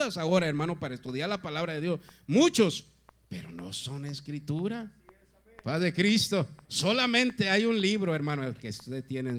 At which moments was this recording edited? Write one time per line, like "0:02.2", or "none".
0:06.6